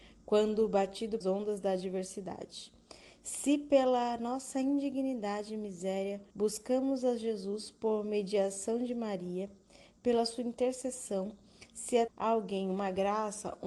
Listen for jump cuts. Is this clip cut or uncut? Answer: cut